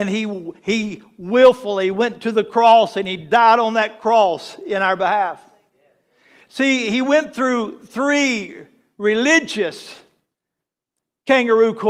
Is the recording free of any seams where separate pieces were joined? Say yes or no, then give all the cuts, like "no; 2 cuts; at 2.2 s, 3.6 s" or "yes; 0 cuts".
yes; 0 cuts